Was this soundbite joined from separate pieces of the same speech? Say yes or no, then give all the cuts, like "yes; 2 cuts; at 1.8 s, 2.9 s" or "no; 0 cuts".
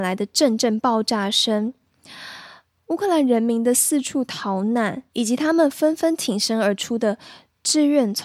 yes; 1 cut; at 5.1 s